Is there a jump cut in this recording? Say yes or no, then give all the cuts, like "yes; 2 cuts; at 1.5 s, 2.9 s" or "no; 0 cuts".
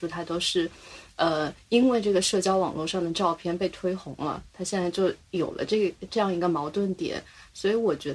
no; 0 cuts